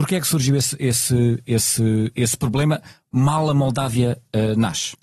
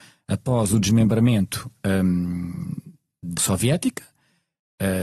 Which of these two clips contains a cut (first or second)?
second